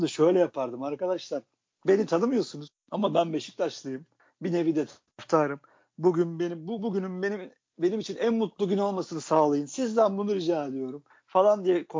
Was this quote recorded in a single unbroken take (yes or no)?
yes